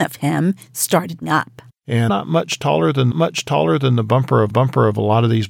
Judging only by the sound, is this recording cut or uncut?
cut